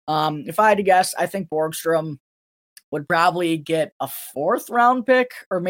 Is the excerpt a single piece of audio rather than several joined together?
yes; 0 cuts

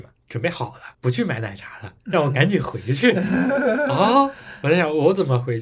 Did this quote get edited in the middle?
yes; 2 cuts; at 0.9 s, 2.0 s

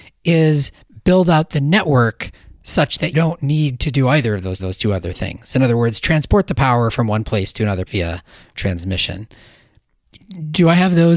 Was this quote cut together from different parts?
yes; 4 cuts; at 3.1 s, 4.6 s, 7.9 s, 8.6 s

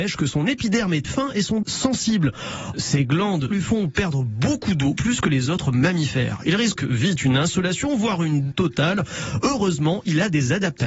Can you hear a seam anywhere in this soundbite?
yes; 7 cuts; at 1.0 s, 1.6 s, 2.7 s, 3.5 s, 5.0 s, 6.8 s, 8.5 s

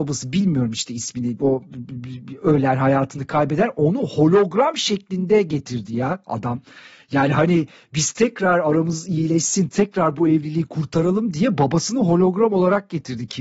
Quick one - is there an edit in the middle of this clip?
no; 0 cuts

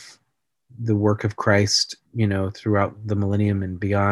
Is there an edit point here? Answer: yes; 1 cut; at 2.0 s

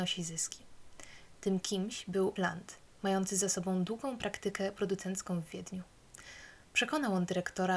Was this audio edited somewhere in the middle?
yes; 1 cut; at 2.4 s

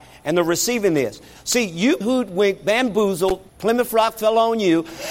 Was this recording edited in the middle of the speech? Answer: yes; 2 cuts; at 2.0 s, 3.5 s

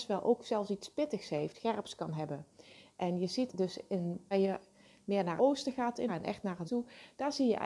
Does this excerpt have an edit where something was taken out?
yes; 6 cuts; at 1.5 s, 3.5 s, 4.3 s, 5.4 s, 6.1 s, 6.6 s

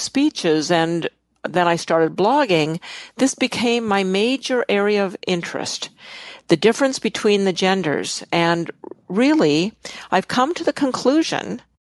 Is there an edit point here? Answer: no; 0 cuts

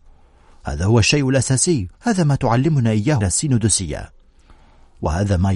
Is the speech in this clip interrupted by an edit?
yes; 2 cuts; at 1.9 s, 3.2 s

